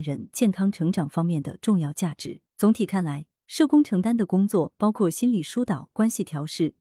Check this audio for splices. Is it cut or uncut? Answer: cut